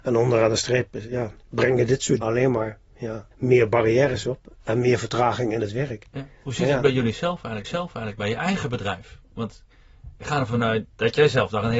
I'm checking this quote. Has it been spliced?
yes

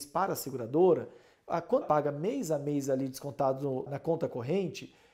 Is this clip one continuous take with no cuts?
no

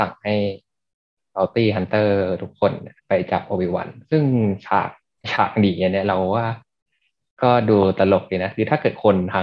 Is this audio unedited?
no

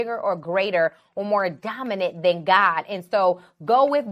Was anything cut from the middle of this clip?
no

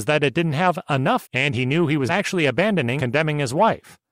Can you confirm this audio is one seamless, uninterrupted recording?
no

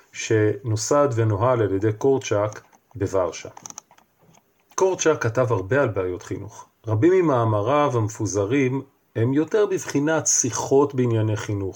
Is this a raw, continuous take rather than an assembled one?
yes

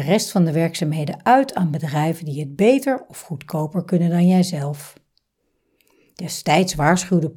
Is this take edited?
no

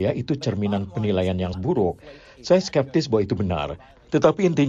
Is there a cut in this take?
yes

